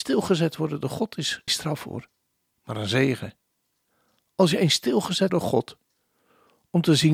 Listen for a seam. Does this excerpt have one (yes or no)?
yes